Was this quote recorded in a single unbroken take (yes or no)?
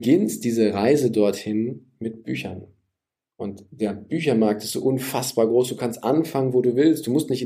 yes